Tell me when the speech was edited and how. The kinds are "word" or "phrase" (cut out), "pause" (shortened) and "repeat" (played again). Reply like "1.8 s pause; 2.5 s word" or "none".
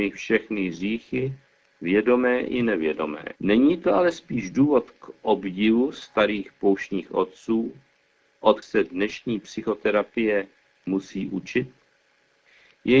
3.4 s pause; 8.6 s word

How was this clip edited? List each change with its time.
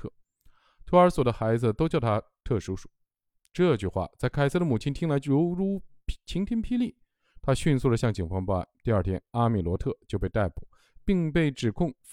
none

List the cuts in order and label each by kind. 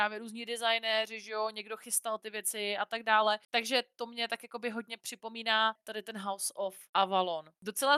none

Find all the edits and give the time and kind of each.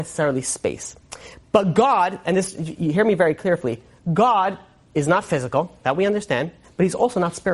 none

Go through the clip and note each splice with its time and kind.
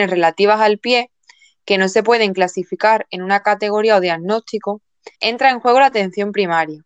5.1 s pause

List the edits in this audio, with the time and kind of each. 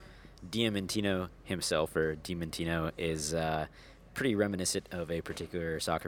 none

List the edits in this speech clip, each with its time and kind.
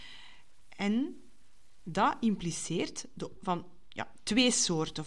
3.4 s word

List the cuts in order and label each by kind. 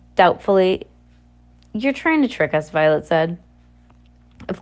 none

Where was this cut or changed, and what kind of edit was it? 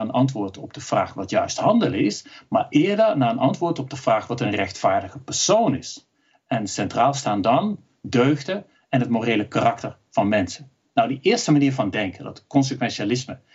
none

